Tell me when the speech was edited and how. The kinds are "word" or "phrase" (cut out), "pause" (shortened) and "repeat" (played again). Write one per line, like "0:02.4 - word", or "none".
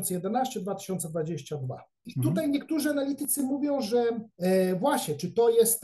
none

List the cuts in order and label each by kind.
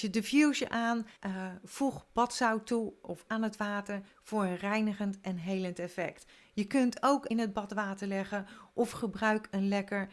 0:01.2 - pause
0:03.3 - word
0:07.3 - phrase

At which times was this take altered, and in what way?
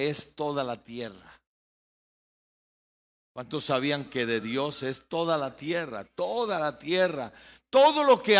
none

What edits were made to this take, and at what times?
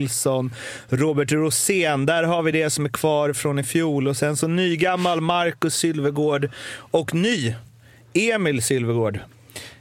none

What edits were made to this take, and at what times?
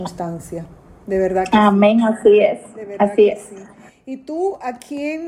none

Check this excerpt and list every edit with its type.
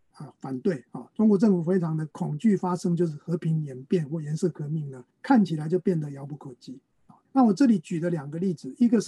0:02.1 - pause
0:05.1 - pause
0:07.2 - pause

